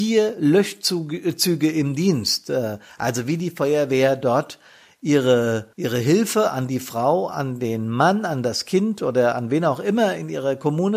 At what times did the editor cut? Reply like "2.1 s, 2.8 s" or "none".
5.7 s